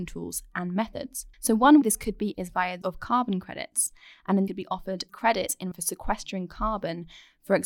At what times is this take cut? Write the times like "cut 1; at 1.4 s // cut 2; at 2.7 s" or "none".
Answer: cut 1; at 1.3 s // cut 2; at 1.8 s // cut 3; at 2.3 s // cut 4; at 2.8 s // cut 5; at 4.5 s // cut 6; at 5.1 s // cut 7; at 5.7 s